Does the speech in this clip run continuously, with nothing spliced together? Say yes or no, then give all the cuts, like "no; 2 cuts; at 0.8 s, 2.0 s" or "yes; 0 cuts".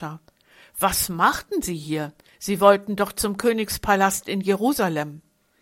yes; 0 cuts